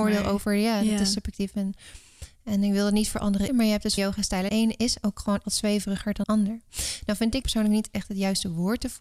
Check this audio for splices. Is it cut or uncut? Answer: cut